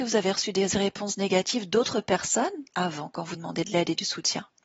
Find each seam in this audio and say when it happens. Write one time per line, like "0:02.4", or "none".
0:03.3

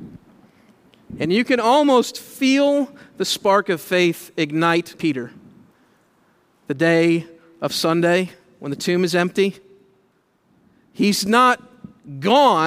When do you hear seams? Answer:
0:04.9

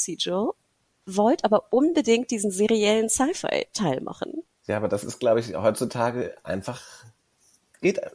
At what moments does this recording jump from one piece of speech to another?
none

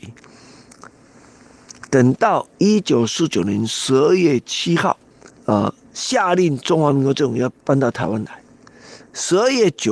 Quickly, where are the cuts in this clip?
0:02.5
0:05.3

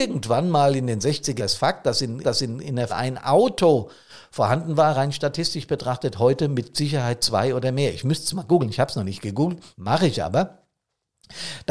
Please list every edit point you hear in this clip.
0:01.4
0:02.2
0:02.9
0:09.7

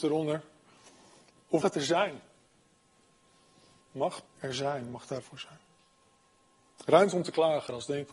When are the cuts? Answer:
0:01.6
0:04.3
0:05.2

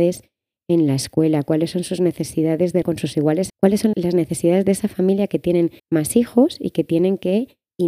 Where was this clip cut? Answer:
0:02.8
0:03.5
0:03.9
0:05.8

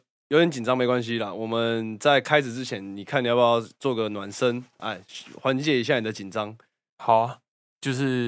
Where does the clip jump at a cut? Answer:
none

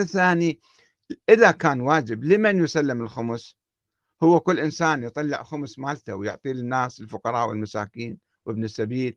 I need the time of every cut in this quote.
none

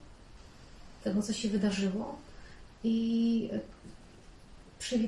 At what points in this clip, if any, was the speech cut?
none

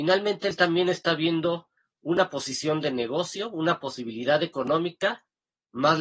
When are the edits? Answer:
0:01.8

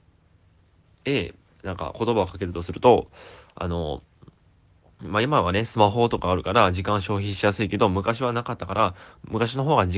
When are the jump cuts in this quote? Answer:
none

